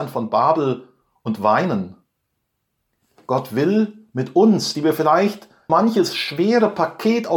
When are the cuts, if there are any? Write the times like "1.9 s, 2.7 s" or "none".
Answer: 5.7 s